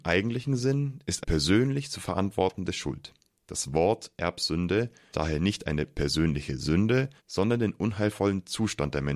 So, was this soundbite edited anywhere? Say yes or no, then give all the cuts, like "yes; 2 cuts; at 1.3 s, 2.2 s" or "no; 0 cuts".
yes; 4 cuts; at 1.2 s, 3.3 s, 5.1 s, 7.2 s